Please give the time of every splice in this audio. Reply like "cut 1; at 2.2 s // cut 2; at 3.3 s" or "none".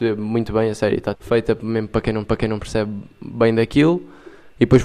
cut 1; at 1.1 s // cut 2; at 2.2 s